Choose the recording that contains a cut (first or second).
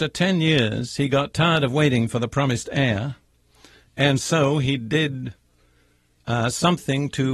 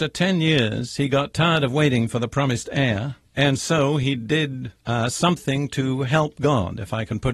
second